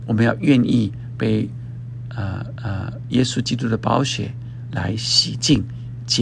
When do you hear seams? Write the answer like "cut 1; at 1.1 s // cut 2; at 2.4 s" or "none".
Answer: cut 1; at 2.6 s